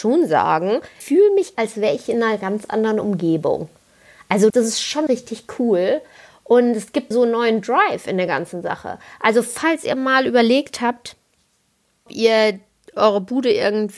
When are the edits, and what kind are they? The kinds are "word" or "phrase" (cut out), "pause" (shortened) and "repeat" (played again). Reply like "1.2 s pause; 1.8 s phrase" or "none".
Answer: 1.0 s word; 1.5 s word; 4.5 s word; 5.1 s word; 7.1 s word; 12.1 s word

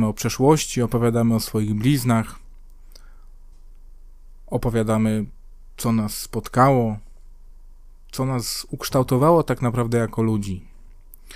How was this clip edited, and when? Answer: none

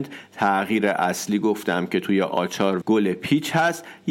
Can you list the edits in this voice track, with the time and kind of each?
2.8 s word

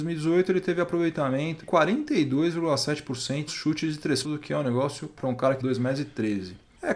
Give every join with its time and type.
1.6 s word; 3.5 s word; 4.2 s word; 5.2 s word; 5.6 s word

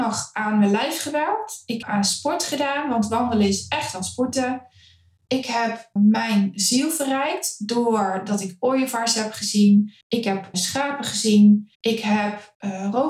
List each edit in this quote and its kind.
1.8 s word; 6.0 s word; 10.0 s pause; 10.5 s word; 11.7 s pause

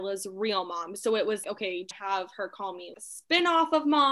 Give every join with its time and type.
1.4 s word; 1.9 s word; 2.9 s word

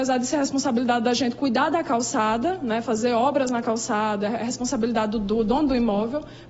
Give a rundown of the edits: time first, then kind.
none

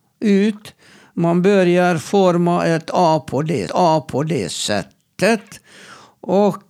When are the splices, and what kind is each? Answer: 3.7 s repeat

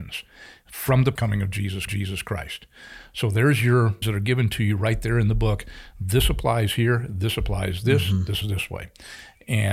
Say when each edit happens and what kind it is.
1.2 s phrase; 1.9 s repeat; 4.0 s word; 8.4 s word

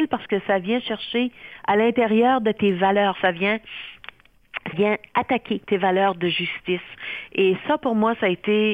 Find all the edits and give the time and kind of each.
3.1 s word; 4.7 s word; 5.6 s pause

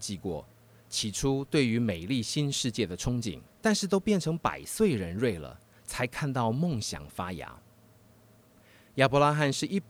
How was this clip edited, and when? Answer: 3.5 s pause

